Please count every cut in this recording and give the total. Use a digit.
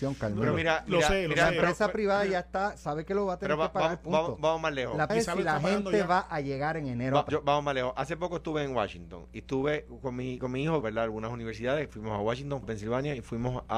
4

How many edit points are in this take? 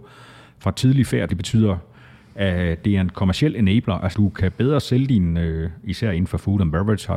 2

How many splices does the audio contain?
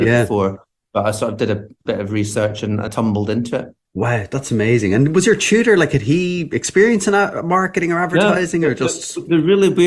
2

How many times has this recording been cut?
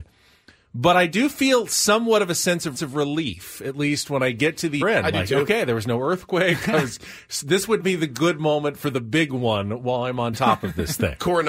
3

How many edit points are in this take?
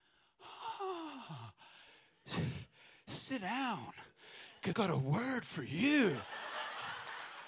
1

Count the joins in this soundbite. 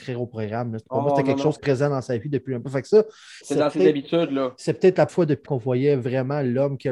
4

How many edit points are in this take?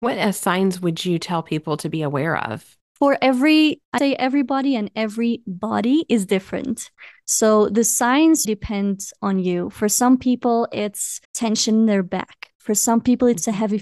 4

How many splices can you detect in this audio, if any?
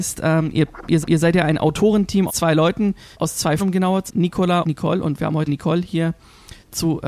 7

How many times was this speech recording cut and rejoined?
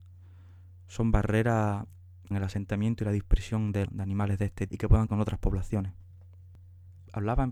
4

